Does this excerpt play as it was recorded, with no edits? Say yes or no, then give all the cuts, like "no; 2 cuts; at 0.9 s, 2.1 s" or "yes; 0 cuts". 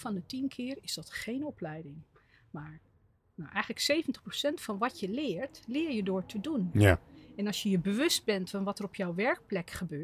yes; 0 cuts